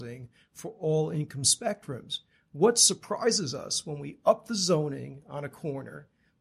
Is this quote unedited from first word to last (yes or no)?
yes